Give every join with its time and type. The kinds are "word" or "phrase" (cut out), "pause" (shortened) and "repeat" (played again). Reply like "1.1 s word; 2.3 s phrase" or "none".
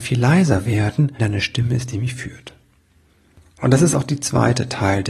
1.2 s word